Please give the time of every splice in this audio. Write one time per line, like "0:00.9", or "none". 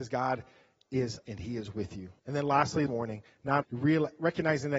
0:01.2
0:02.2
0:02.9
0:03.6